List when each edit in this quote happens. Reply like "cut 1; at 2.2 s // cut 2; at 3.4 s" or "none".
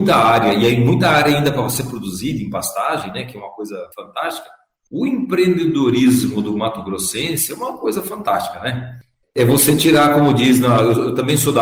cut 1; at 3.9 s